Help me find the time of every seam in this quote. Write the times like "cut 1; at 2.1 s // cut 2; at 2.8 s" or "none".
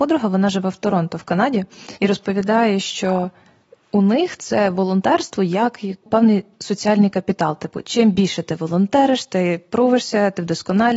cut 1; at 2.0 s // cut 2; at 6.1 s

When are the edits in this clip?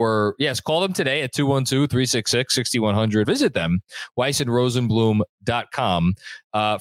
cut 1; at 3.2 s

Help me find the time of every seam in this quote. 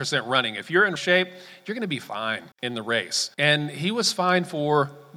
cut 1; at 1.0 s // cut 2; at 2.5 s // cut 3; at 3.3 s

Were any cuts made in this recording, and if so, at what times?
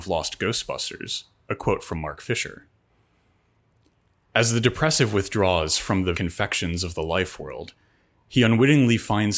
cut 1; at 6.1 s

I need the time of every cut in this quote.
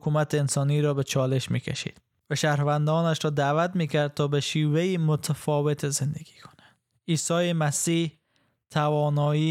none

